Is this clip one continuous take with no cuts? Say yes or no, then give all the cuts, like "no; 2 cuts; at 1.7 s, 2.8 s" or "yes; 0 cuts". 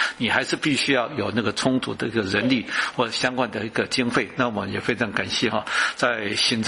yes; 0 cuts